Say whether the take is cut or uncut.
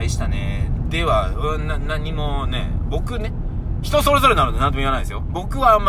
uncut